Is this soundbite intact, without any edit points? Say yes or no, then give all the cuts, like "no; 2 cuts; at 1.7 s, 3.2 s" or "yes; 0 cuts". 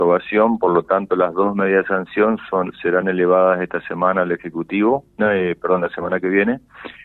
yes; 0 cuts